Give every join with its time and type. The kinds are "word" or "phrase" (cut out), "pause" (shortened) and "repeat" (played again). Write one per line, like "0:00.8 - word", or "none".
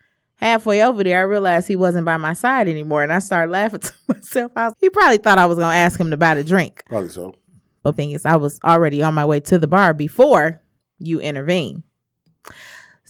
0:04.7 - word
0:07.9 - word
0:10.8 - pause